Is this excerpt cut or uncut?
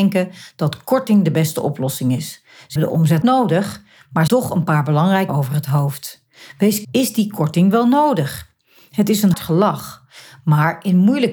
cut